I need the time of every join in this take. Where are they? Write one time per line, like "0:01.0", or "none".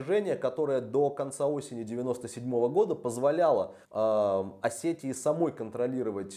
0:03.8